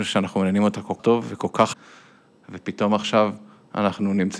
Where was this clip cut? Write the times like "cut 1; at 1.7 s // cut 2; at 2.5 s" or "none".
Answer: cut 1; at 1.0 s // cut 2; at 1.7 s